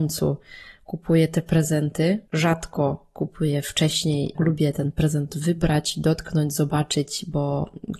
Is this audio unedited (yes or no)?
no